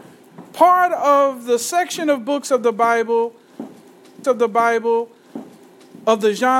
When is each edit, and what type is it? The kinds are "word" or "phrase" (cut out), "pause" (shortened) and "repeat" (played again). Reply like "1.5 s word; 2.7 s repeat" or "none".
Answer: 4.2 s repeat